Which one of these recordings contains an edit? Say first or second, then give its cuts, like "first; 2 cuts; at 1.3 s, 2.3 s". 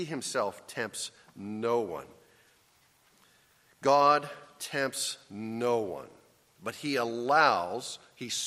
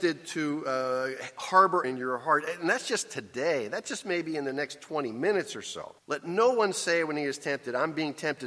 second; 2 cuts; at 1.8 s, 6.0 s